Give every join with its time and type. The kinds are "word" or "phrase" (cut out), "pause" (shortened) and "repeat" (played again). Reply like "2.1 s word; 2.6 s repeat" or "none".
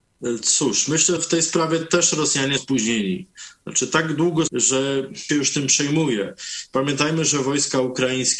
1.2 s word; 2.6 s word; 4.5 s word; 5.3 s phrase